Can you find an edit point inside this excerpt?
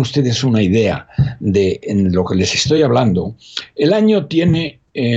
no; 0 cuts

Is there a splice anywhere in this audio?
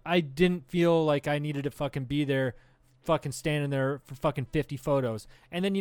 no; 0 cuts

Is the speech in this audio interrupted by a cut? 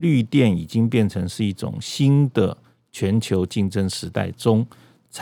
no; 0 cuts

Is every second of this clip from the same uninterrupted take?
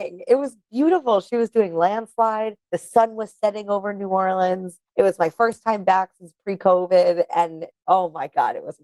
no; 2 cuts; at 2.6 s, 4.9 s

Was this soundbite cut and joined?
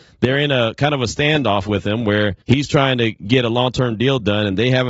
yes; 1 cut; at 2.4 s

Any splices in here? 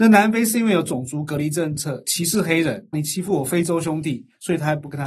yes; 1 cut; at 2.9 s

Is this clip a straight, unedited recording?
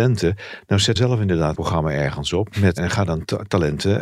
no; 3 cuts; at 1.0 s, 1.5 s, 2.8 s

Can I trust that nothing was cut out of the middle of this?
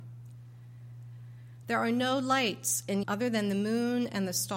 no; 1 cut; at 3.0 s

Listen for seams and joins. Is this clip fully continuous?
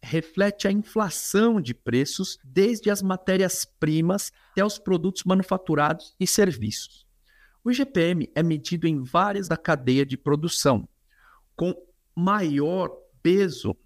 no; 3 cuts; at 2.4 s, 4.6 s, 9.4 s

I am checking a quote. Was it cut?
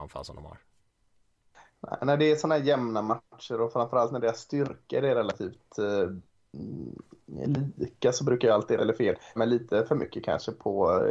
yes; 2 cuts; at 8.8 s, 9.4 s

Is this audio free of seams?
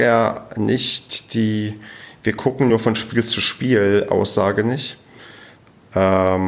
yes; 0 cuts

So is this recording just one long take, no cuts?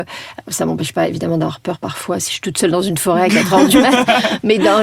yes; 0 cuts

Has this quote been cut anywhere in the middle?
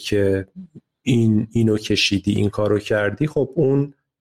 no; 0 cuts

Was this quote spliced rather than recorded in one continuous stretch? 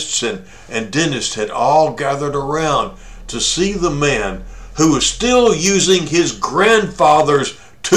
no; 0 cuts

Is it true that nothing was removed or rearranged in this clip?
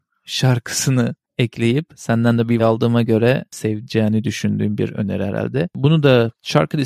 no; 1 cut; at 2.6 s

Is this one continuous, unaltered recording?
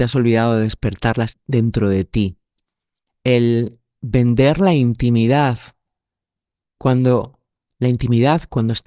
yes; 0 cuts

